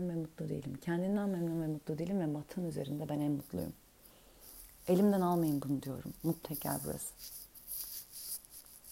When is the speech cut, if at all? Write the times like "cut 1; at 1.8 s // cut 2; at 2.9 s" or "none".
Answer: cut 1; at 6.4 s